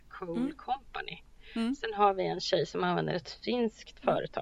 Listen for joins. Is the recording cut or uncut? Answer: uncut